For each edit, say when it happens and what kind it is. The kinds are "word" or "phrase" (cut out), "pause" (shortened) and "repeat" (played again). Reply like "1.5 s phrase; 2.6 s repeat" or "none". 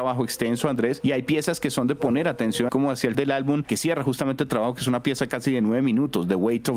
2.7 s word; 3.1 s word; 3.7 s word